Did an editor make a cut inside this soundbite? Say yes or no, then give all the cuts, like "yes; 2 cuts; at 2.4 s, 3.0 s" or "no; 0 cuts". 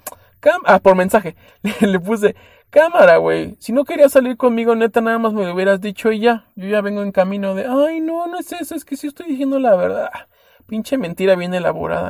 no; 0 cuts